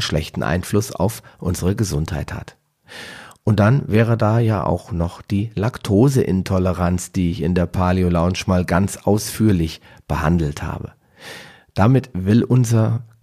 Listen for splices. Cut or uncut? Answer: uncut